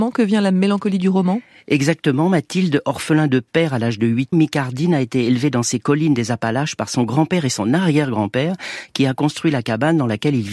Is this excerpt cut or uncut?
cut